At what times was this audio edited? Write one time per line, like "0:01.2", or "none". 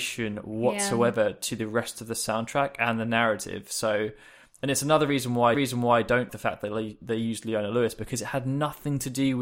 0:05.5
0:06.3